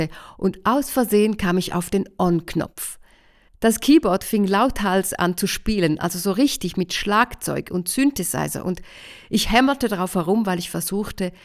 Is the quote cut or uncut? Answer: uncut